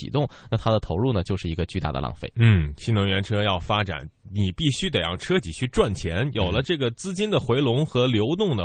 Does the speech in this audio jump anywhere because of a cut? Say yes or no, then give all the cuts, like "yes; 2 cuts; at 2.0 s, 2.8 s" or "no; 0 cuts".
no; 0 cuts